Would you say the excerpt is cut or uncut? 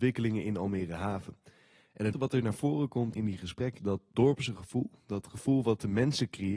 cut